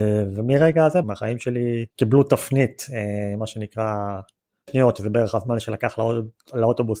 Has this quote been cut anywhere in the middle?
yes; 3 cuts; at 1.0 s, 1.9 s, 4.7 s

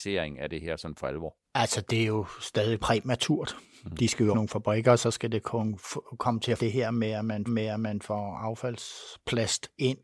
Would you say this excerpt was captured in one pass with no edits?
no; 5 cuts; at 1.4 s, 2.8 s, 4.3 s, 6.6 s, 7.5 s

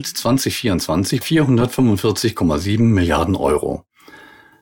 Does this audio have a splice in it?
yes; 1 cut; at 1.2 s

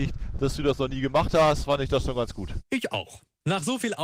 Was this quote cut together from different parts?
no; 0 cuts

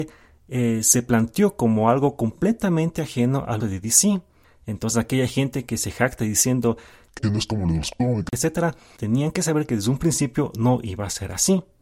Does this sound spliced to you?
yes; 3 cuts; at 3.6 s, 7.2 s, 9.0 s

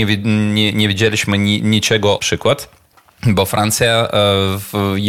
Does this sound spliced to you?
yes; 1 cut; at 2.2 s

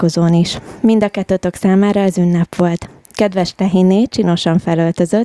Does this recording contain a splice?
no; 0 cuts

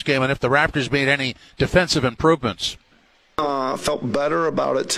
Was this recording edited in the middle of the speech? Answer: no; 0 cuts

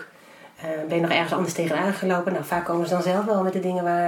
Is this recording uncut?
yes; 0 cuts

